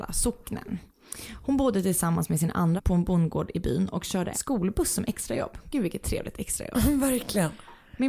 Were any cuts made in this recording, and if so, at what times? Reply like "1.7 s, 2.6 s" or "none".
2.8 s, 4.3 s

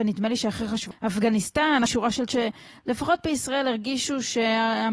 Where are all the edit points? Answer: 0.9 s, 1.9 s, 2.3 s

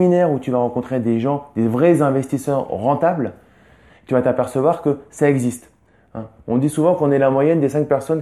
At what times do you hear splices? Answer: none

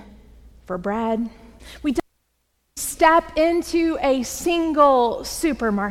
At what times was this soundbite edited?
1.6 s, 2.8 s

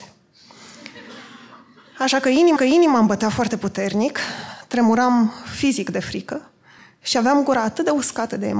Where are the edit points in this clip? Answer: 2.6 s

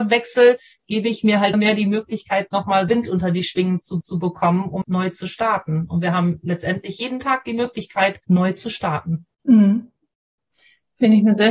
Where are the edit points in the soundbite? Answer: 1.5 s, 2.9 s, 4.0 s, 4.8 s, 8.2 s, 9.3 s

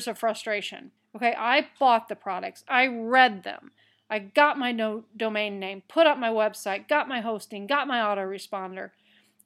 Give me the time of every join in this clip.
1.0 s

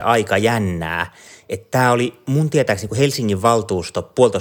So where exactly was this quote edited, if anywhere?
none

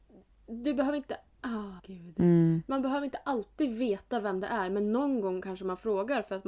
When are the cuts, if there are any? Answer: 1.8 s

